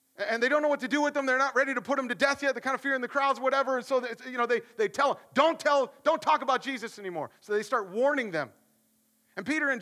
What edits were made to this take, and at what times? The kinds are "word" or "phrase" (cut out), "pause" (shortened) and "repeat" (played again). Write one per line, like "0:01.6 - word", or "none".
none